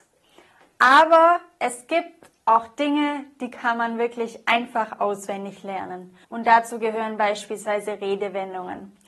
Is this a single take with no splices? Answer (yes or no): no